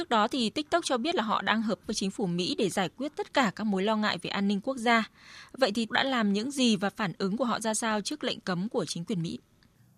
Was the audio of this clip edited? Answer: yes; 2 cuts; at 1.8 s, 5.9 s

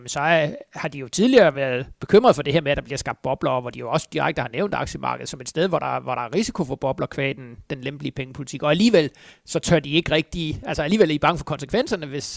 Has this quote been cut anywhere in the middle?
no; 0 cuts

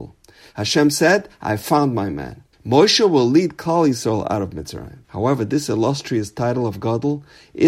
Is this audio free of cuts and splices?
no; 2 cuts; at 2.5 s, 5.0 s

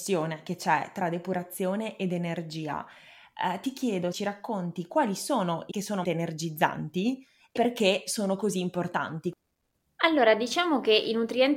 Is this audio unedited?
no; 4 cuts; at 4.1 s, 5.7 s, 6.0 s, 7.5 s

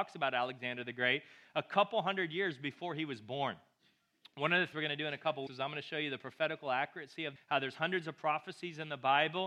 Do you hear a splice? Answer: yes; 3 cuts; at 4.7 s, 5.5 s, 7.4 s

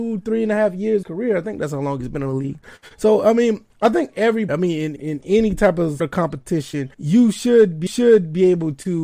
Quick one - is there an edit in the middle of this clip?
yes; 7 cuts; at 1.0 s, 3.7 s, 4.5 s, 5.0 s, 6.0 s, 6.9 s, 7.9 s

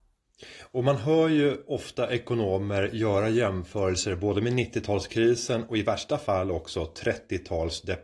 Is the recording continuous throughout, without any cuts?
yes; 0 cuts

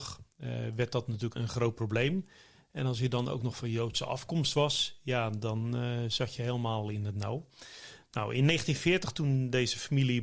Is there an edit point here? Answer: yes; 1 cut; at 1.3 s

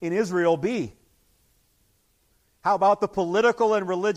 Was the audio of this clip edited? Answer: no; 0 cuts

